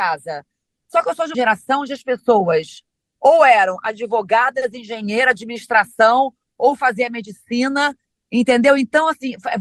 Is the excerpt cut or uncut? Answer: cut